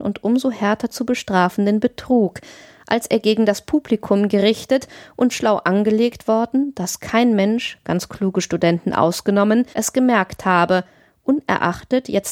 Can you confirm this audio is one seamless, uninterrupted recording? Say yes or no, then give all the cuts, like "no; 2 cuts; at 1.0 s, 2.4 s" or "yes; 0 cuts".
no; 2 cuts; at 5.3 s, 9.7 s